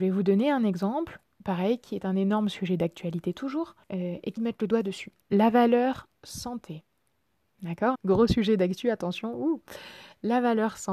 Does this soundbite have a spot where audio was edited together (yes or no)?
yes